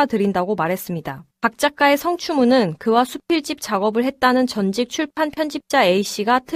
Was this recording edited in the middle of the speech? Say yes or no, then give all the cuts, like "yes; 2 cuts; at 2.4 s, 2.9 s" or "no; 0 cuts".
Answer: yes; 1 cut; at 1.3 s